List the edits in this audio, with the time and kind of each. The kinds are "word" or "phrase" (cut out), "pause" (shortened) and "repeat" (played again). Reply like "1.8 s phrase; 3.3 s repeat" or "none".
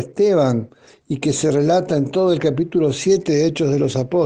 none